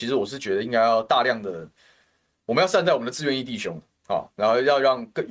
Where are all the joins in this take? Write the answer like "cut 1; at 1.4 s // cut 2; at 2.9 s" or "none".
none